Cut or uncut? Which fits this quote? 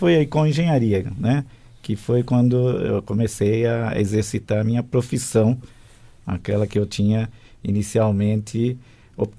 uncut